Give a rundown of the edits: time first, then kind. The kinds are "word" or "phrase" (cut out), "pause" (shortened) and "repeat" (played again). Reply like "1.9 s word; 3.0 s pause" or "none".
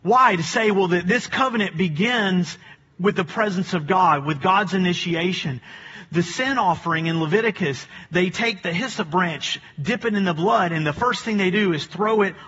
none